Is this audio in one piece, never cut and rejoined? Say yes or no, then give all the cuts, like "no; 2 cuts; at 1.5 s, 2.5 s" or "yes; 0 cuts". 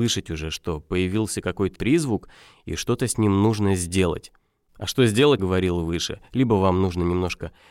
no; 2 cuts; at 1.7 s, 5.4 s